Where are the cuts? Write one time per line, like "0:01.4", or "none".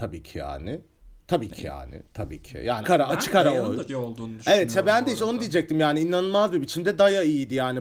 0:02.8
0:03.9